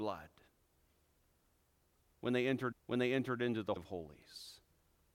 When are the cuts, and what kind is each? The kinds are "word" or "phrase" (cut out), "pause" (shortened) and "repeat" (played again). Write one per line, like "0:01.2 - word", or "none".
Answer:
0:02.7 - repeat
0:03.8 - word